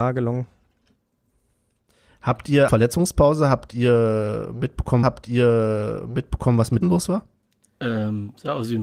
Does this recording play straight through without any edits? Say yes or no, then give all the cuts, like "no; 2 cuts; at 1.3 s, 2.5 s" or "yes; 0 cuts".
no; 4 cuts; at 2.7 s, 5.0 s, 6.8 s, 7.4 s